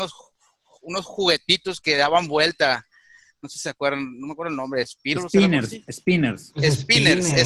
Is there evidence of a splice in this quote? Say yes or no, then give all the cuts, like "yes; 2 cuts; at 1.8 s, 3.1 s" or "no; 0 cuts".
no; 0 cuts